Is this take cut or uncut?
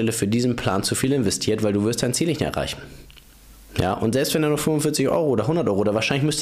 uncut